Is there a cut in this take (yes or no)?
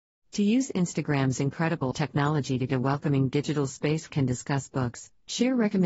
yes